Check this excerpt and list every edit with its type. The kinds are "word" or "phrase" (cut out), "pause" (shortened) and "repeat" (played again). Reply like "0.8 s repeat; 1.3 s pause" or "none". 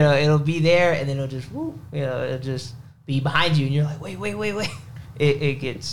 3.0 s pause